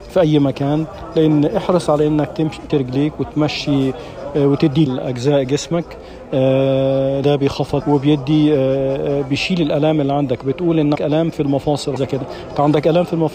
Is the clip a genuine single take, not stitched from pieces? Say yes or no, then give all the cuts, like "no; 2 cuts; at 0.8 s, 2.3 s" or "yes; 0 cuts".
no; 6 cuts; at 2.7 s, 4.9 s, 7.2 s, 7.8 s, 10.9 s, 12.0 s